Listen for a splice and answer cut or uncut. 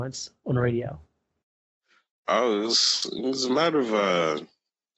uncut